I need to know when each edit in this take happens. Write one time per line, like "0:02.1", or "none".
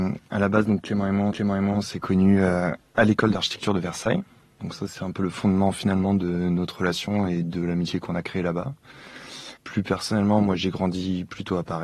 0:01.3
0:09.6